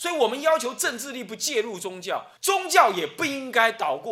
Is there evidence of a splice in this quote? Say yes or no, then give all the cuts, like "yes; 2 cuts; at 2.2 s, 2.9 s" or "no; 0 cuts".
yes; 1 cut; at 2.4 s